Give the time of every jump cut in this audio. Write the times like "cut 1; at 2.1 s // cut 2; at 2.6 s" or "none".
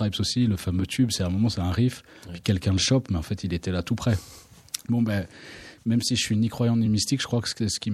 none